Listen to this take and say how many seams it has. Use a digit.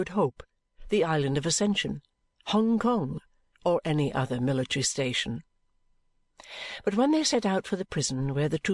0